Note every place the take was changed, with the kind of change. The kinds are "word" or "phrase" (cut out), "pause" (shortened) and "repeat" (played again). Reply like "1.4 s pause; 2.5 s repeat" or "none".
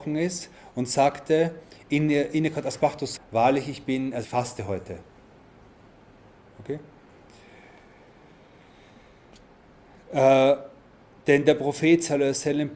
3.2 s word; 4.2 s phrase